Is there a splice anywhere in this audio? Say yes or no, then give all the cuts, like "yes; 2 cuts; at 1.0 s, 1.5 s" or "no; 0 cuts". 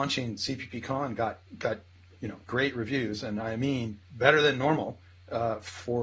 yes; 3 cuts; at 1.5 s, 2.4 s, 4.0 s